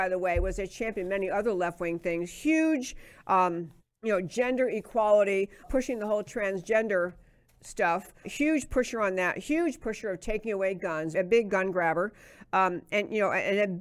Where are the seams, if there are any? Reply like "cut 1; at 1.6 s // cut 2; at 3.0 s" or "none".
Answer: cut 1; at 3.8 s // cut 2; at 5.6 s // cut 3; at 8.2 s // cut 4; at 11.1 s

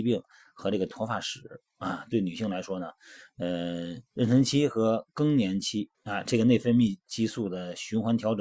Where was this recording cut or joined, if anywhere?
cut 1; at 4.1 s // cut 2; at 5.9 s

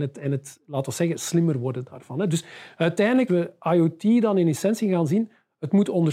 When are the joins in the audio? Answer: cut 1; at 3.3 s

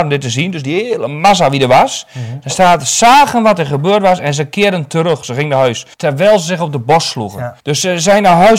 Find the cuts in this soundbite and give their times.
cut 1; at 5.9 s // cut 2; at 7.6 s

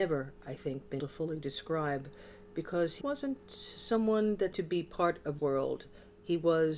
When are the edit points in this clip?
cut 1; at 1.0 s // cut 2; at 3.0 s // cut 3; at 4.5 s // cut 4; at 5.4 s

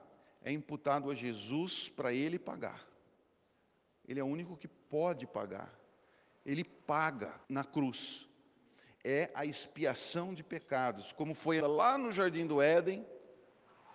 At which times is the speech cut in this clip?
cut 1; at 7.4 s // cut 2; at 11.6 s

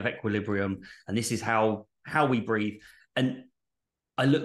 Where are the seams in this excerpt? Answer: none

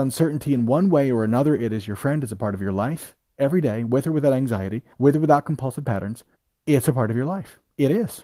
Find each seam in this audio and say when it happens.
cut 1; at 4.9 s // cut 2; at 6.3 s

